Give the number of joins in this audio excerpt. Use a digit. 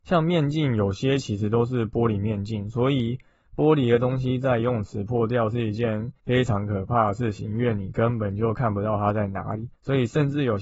1